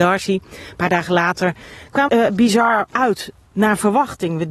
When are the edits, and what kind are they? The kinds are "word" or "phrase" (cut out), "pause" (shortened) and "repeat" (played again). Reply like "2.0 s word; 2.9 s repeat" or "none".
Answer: 2.1 s phrase; 2.9 s word